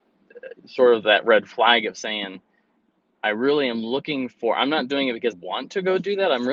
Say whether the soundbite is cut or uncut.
cut